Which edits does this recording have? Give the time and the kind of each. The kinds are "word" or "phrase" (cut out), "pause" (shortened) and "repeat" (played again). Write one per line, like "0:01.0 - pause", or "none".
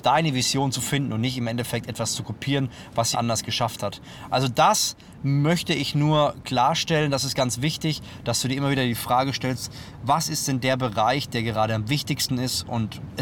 0:03.1 - word